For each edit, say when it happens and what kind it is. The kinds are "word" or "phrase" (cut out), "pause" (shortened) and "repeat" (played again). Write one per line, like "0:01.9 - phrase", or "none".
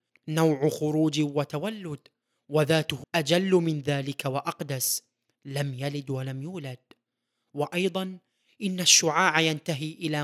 0:03.0 - word